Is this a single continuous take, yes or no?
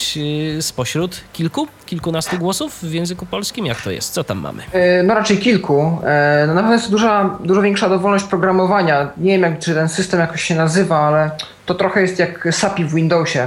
yes